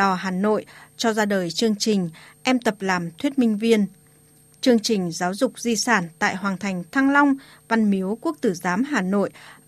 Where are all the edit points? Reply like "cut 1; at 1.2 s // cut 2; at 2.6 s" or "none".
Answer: none